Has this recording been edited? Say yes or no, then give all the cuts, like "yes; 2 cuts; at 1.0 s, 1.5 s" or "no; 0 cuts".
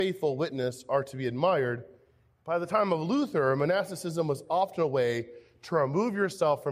no; 0 cuts